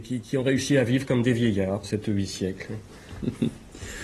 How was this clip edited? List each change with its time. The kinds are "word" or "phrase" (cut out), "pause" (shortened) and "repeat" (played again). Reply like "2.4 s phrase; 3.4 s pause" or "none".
1.8 s word